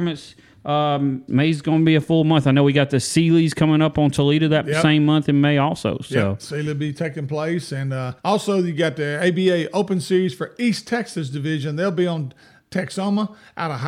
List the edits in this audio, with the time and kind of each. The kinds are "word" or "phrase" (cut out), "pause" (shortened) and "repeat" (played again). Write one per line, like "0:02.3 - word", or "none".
0:01.3 - word
0:08.2 - pause